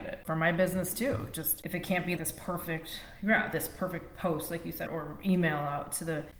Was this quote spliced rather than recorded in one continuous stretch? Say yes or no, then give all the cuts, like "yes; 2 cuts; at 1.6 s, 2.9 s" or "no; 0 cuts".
yes; 2 cuts; at 2.2 s, 4.9 s